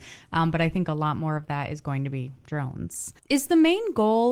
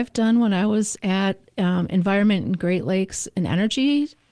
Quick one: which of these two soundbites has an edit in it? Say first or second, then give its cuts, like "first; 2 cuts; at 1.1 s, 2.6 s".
first; 1 cut; at 3.2 s